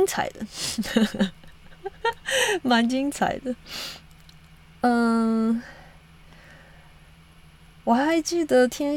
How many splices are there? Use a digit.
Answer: 0